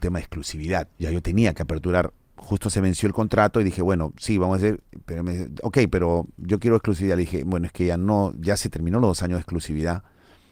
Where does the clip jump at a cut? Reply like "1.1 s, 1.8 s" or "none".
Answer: 0.9 s